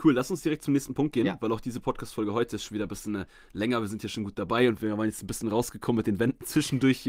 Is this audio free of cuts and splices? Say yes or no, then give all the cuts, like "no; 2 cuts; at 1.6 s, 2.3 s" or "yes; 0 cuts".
yes; 0 cuts